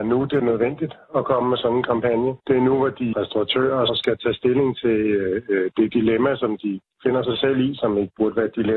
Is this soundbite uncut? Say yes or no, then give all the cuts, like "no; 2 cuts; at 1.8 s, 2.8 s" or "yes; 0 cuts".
no; 3 cuts; at 2.4 s, 3.1 s, 3.9 s